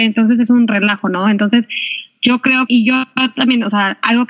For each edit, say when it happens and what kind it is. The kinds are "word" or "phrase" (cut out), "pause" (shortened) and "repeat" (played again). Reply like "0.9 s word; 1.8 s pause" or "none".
2.7 s word